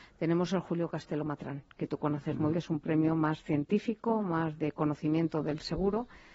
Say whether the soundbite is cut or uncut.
cut